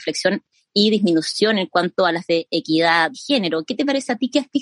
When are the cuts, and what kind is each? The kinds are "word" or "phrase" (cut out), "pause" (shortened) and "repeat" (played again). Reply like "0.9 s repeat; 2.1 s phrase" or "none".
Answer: 2.3 s word; 3.1 s word